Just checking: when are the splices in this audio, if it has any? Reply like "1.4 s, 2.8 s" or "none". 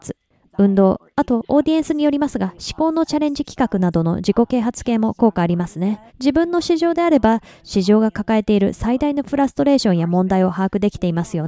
6.1 s